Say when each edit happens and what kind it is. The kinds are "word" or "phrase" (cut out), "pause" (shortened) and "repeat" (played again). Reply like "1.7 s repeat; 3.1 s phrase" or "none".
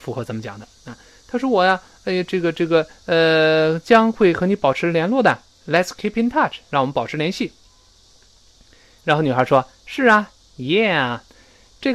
none

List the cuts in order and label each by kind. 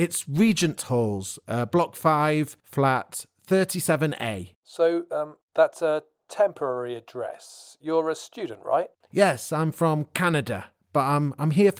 2.6 s pause; 4.5 s pause

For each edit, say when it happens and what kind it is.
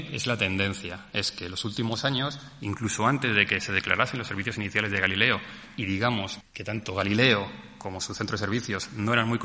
6.4 s word

